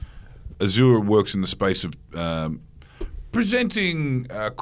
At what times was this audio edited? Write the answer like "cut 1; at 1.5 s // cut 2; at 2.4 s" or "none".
none